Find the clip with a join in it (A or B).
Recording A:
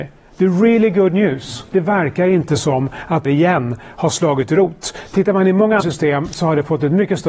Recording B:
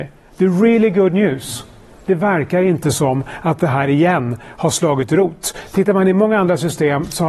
A